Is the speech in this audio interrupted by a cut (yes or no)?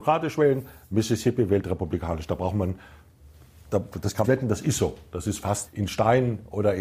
yes